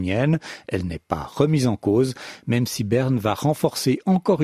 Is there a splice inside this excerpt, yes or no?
no